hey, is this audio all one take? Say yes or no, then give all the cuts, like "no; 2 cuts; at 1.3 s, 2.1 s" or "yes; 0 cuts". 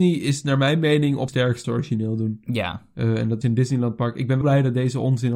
no; 4 cuts; at 1.3 s, 1.6 s, 3.4 s, 4.4 s